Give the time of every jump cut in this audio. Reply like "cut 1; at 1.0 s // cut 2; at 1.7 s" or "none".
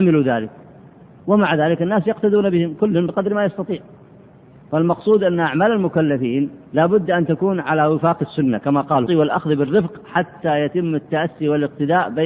cut 1; at 6.7 s // cut 2; at 9.1 s